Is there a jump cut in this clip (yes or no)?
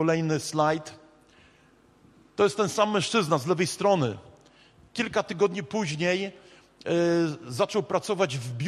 no